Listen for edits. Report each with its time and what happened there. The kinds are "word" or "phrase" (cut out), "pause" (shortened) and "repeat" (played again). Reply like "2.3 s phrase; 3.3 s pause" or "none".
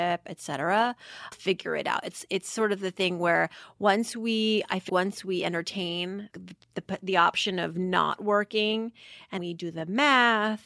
1.3 s word; 4.9 s word; 6.3 s word; 9.4 s word